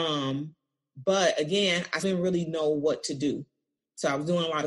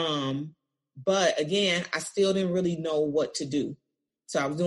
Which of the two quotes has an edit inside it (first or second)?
first